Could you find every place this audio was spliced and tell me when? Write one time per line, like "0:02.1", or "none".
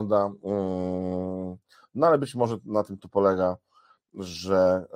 none